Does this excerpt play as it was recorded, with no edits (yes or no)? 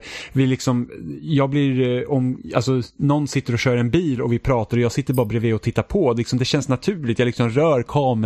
yes